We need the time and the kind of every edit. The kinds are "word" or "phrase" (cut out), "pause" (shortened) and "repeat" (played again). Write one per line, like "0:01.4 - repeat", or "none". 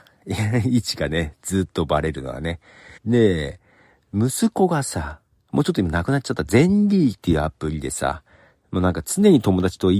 0:03.0 - pause